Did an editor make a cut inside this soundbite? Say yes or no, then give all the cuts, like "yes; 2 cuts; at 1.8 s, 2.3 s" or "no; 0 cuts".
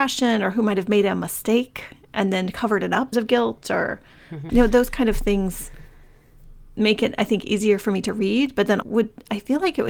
yes; 3 cuts; at 3.1 s, 4.5 s, 8.8 s